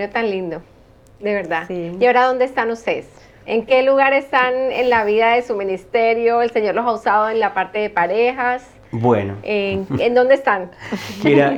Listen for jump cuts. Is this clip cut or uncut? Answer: uncut